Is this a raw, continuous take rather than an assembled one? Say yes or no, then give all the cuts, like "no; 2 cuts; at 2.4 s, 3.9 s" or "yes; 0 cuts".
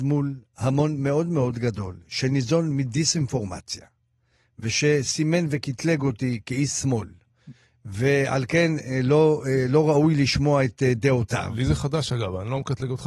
yes; 0 cuts